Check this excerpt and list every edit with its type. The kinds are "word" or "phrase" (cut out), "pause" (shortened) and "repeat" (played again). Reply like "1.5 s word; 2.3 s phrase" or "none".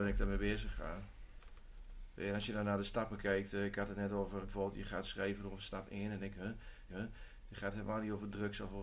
4.4 s word; 6.9 s repeat

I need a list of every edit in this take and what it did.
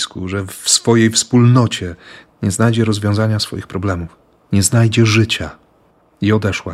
none

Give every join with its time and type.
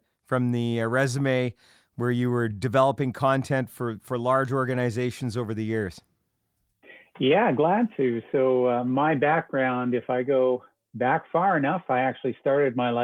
none

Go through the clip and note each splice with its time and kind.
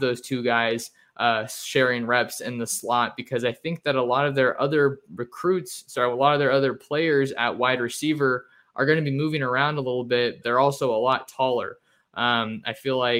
10.4 s word

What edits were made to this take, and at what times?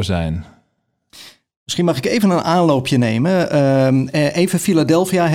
none

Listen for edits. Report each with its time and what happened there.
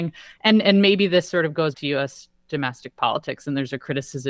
1.7 s word

